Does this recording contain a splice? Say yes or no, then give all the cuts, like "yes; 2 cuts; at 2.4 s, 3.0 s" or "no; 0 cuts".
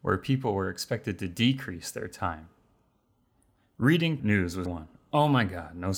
yes; 2 cuts; at 4.2 s, 4.7 s